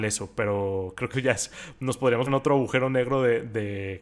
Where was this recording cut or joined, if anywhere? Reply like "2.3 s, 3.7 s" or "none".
1.1 s, 2.3 s